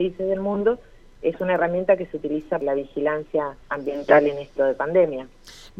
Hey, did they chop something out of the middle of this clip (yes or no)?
yes